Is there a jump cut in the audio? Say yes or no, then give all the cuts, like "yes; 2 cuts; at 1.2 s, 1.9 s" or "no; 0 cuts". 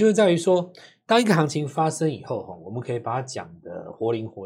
no; 0 cuts